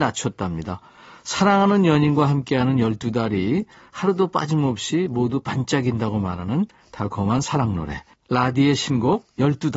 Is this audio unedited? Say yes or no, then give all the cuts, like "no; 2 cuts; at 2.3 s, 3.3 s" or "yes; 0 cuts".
yes; 0 cuts